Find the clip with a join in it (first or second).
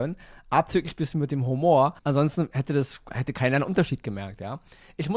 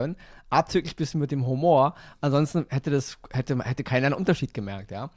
first